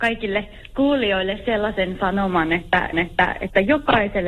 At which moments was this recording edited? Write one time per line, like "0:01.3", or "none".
0:02.9